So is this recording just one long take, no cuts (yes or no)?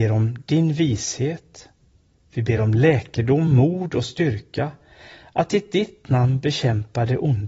yes